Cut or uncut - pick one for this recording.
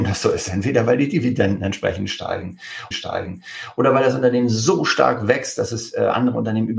cut